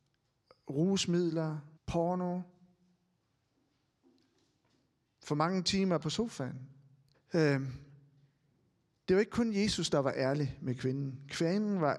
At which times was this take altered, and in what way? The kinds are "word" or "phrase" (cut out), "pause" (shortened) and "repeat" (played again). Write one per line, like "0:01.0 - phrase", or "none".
0:01.8 - pause
0:06.0 - word
0:07.1 - pause